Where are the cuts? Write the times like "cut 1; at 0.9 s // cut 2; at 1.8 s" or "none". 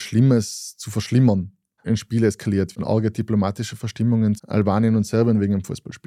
cut 1; at 1.8 s // cut 2; at 2.8 s // cut 3; at 4.4 s